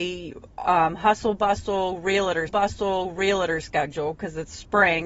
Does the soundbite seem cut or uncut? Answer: cut